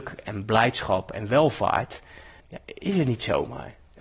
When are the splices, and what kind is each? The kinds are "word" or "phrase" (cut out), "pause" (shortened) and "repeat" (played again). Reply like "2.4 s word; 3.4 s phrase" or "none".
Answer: 2.4 s phrase